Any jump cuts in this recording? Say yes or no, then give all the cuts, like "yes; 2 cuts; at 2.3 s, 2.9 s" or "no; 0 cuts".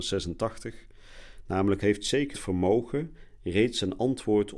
yes; 2 cuts; at 1.8 s, 2.3 s